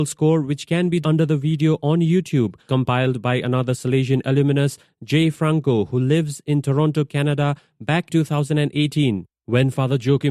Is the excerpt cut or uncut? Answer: cut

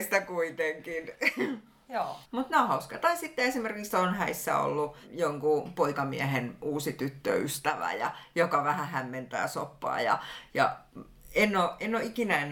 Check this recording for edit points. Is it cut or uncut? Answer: cut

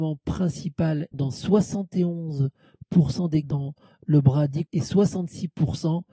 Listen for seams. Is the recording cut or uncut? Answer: cut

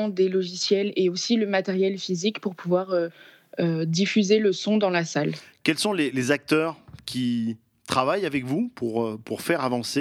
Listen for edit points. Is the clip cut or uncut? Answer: uncut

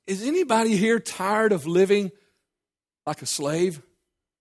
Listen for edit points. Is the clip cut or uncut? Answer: uncut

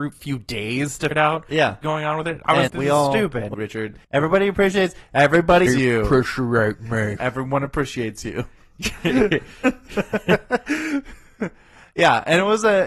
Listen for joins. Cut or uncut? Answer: cut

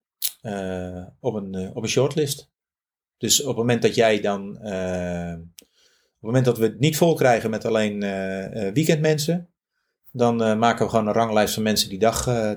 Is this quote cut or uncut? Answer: uncut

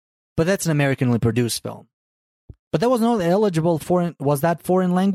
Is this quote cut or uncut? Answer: cut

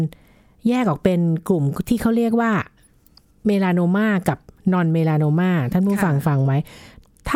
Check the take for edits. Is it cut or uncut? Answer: uncut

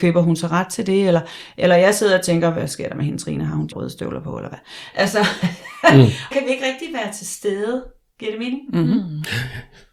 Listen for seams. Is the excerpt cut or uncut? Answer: cut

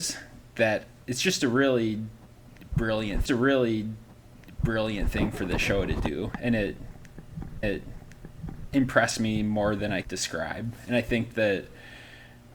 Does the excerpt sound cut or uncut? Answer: cut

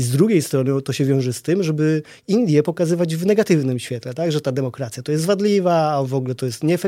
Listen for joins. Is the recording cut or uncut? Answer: uncut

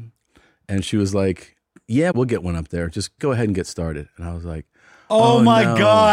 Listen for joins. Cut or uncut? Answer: cut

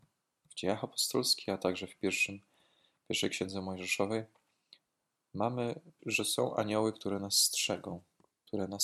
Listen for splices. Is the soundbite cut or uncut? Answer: cut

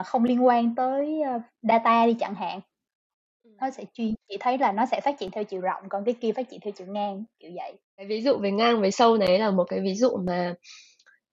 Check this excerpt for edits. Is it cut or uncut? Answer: uncut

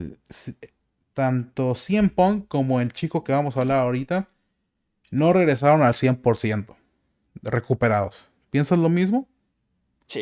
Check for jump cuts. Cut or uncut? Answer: uncut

